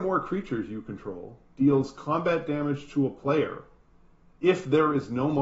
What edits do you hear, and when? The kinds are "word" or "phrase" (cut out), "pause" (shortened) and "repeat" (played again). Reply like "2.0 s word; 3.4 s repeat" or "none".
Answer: none